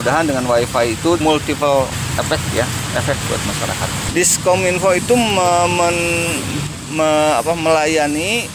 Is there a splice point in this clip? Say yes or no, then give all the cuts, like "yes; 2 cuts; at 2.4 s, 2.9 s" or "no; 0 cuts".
yes; 2 cuts; at 1.2 s, 3.2 s